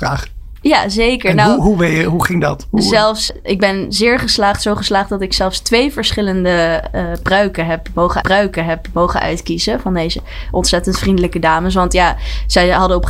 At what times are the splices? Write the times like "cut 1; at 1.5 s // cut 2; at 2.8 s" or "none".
cut 1; at 3.3 s // cut 2; at 8.2 s